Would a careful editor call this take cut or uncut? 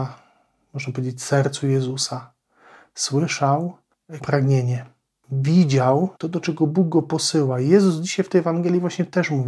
cut